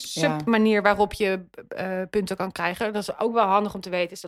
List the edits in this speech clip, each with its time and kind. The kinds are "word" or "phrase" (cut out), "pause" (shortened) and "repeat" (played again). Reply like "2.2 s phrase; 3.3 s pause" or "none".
none